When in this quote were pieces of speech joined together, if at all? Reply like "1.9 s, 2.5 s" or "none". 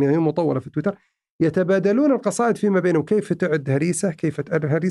none